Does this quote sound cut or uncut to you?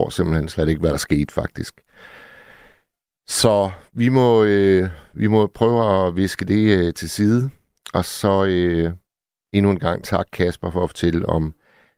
uncut